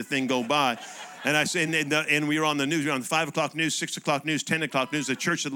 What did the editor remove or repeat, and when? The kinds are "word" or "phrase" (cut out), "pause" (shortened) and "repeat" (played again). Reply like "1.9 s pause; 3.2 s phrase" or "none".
none